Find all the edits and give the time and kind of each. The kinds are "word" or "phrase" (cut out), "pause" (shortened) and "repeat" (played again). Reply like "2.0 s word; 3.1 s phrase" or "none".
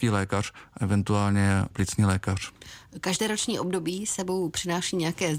1.7 s word